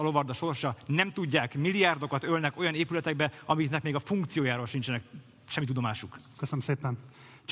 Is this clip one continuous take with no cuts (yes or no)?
yes